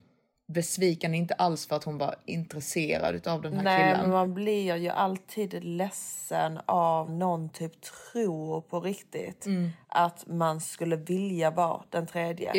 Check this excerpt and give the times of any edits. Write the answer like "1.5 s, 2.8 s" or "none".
7.1 s